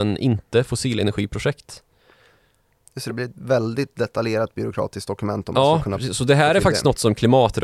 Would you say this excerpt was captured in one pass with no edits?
yes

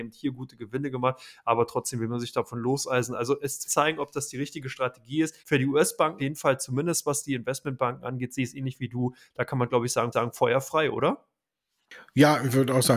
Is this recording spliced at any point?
yes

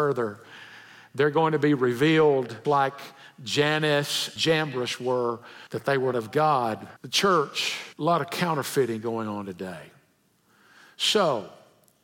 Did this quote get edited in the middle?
yes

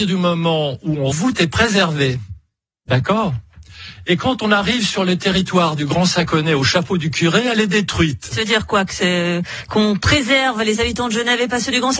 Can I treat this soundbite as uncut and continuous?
no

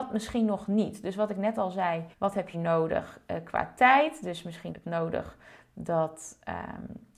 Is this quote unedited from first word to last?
no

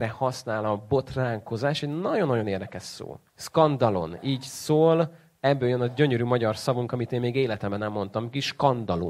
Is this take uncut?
no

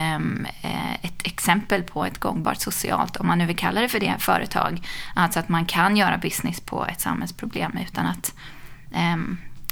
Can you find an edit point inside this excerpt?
no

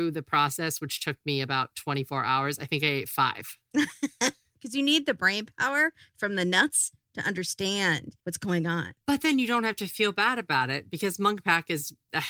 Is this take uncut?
no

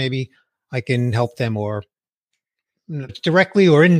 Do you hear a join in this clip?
yes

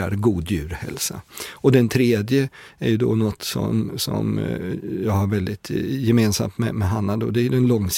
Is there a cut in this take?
no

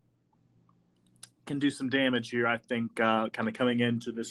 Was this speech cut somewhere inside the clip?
no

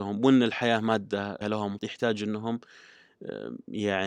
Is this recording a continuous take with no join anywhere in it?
no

